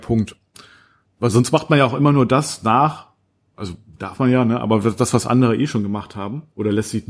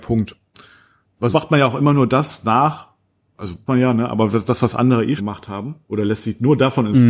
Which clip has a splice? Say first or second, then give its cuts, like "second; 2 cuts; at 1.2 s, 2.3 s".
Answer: second; 3 cuts; at 1.3 s, 3.7 s, 5.2 s